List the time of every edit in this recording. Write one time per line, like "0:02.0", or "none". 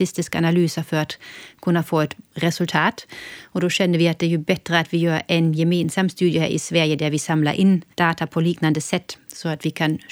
0:07.9

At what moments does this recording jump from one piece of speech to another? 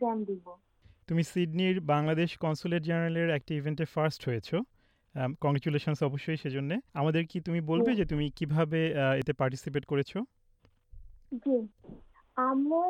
0:06.9

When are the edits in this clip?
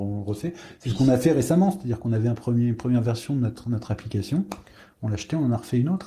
none

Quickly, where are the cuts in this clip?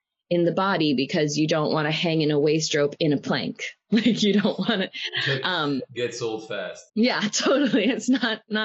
0:06.9

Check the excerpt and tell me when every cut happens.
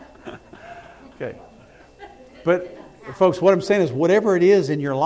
none

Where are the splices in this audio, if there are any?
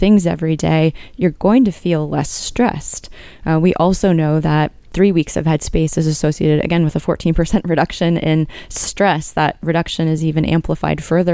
none

